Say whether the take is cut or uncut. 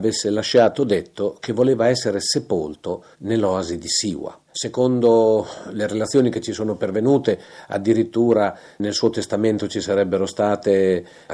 cut